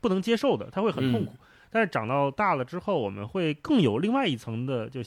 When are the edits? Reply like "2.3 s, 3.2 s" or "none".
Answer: none